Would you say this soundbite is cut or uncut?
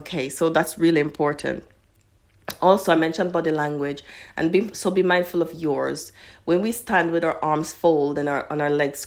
uncut